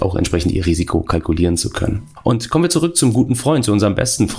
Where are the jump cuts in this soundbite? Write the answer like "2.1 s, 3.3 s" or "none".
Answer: none